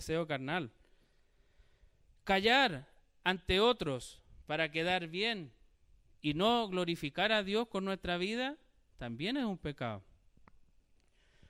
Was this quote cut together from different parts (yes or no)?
no